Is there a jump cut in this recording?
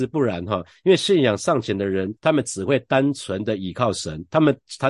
yes; 1 cut; at 2.2 s

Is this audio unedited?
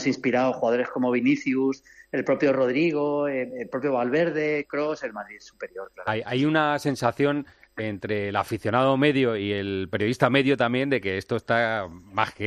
yes; 0 cuts

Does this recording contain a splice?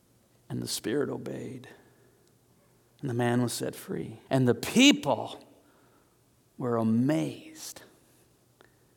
yes; 1 cut; at 4.3 s

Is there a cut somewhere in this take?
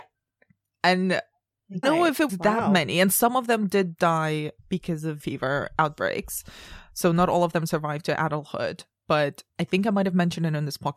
yes; 5 cuts; at 1.8 s, 2.3 s, 4.6 s, 5.2 s, 9.5 s

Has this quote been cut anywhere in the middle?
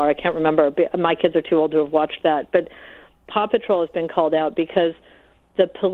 no; 0 cuts

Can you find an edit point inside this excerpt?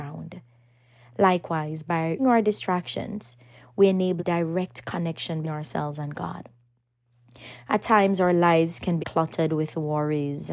yes; 4 cuts; at 2.2 s, 4.2 s, 5.4 s, 9.0 s

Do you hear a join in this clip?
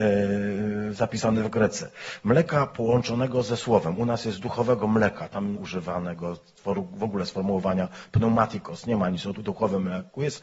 yes; 2 cuts; at 5.5 s, 9.3 s

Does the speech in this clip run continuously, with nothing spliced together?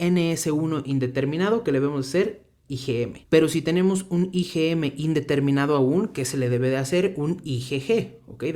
no; 1 cut; at 3.2 s

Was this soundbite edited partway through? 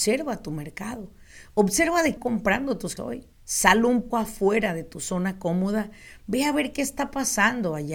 yes; 4 cuts; at 2.2 s, 3.0 s, 3.3 s, 4.1 s

